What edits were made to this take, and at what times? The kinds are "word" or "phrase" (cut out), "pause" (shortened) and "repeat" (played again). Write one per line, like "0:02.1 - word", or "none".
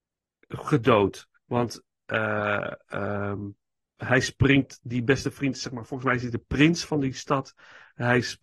0:01.4 - pause
0:03.9 - pause